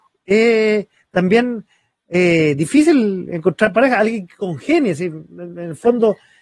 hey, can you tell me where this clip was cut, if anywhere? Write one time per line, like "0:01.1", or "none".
none